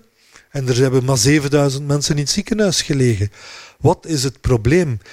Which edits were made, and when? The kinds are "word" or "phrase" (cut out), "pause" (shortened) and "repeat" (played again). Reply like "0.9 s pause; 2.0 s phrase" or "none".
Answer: none